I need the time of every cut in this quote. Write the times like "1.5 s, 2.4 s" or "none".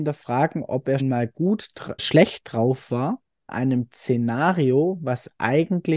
1.0 s, 2.0 s, 3.5 s